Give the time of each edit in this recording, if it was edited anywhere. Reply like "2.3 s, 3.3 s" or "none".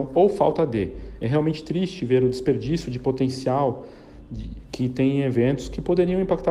none